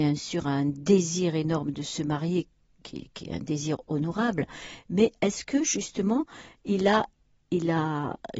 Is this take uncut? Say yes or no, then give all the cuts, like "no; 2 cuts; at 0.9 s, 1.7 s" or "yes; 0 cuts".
yes; 0 cuts